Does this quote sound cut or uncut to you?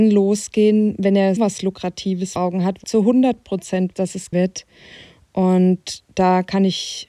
cut